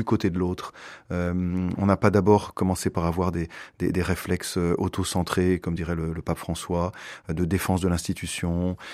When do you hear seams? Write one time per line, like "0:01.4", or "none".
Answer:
none